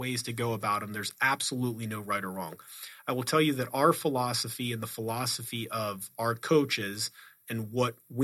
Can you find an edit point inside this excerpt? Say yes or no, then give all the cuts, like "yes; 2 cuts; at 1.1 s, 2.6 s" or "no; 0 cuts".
no; 0 cuts